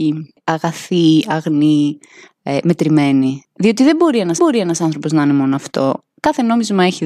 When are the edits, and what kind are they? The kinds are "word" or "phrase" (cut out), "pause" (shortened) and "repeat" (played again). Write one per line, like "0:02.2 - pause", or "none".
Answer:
0:04.4 - repeat